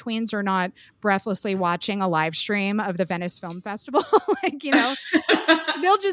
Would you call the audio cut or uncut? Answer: uncut